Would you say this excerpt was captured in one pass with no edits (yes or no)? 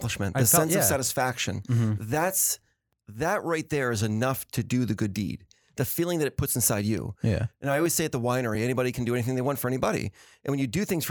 yes